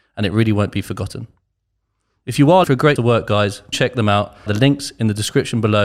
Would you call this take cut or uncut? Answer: cut